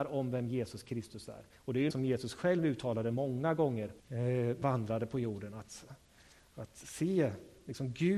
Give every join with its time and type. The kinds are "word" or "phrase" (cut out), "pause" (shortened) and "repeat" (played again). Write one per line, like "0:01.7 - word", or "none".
0:01.5 - pause
0:01.9 - word
0:04.0 - pause
0:04.6 - word